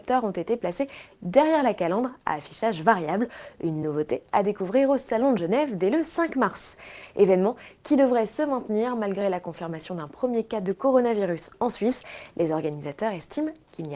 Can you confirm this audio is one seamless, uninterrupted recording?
yes; 0 cuts

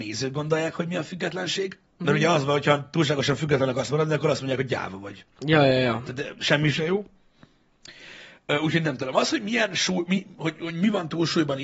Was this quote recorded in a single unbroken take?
no; 1 cut; at 1.9 s

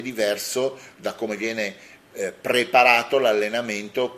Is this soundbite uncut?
yes; 0 cuts

